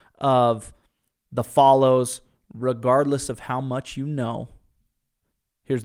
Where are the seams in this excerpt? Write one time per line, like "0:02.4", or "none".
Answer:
none